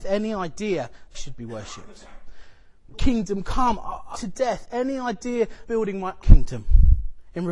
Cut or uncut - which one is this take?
cut